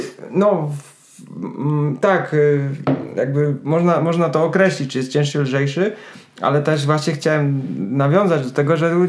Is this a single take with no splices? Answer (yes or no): yes